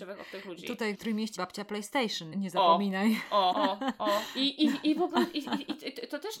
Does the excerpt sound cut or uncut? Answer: cut